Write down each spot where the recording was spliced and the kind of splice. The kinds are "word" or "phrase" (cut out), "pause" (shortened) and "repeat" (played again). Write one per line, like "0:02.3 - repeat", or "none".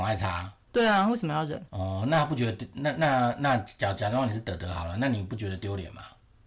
0:01.7 - pause